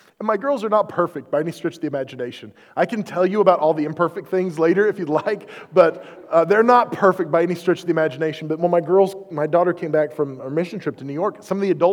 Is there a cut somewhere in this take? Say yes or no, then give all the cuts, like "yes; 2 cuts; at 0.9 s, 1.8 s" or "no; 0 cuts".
no; 0 cuts